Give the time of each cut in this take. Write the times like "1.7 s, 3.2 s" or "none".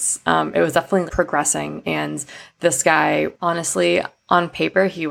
1.1 s